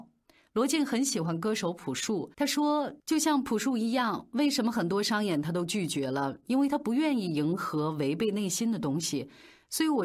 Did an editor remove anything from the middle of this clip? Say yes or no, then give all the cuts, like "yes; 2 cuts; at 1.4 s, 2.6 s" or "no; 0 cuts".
yes; 1 cut; at 2.3 s